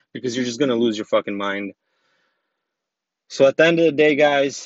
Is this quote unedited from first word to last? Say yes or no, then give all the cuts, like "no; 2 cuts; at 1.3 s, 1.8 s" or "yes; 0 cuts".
yes; 0 cuts